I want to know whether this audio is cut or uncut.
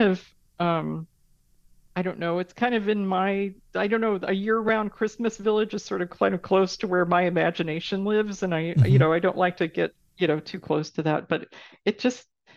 uncut